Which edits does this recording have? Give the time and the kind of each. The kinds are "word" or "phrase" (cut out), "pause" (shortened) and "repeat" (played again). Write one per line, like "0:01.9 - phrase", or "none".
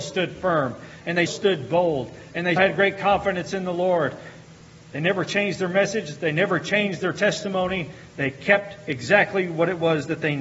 0:01.3 - word
0:02.6 - word